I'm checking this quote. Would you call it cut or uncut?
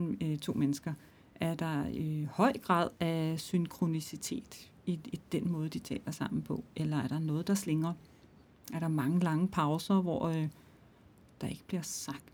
uncut